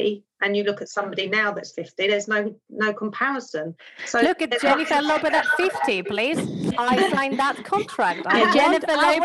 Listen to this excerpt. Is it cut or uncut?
uncut